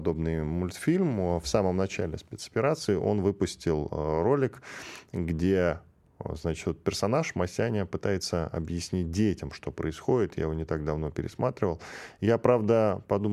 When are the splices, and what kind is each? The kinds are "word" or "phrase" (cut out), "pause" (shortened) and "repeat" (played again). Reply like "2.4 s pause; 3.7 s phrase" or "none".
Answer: none